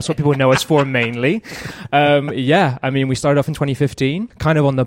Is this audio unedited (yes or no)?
yes